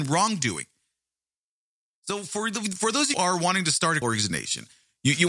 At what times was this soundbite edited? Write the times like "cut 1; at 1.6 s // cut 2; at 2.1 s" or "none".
cut 1; at 3.1 s // cut 2; at 4.0 s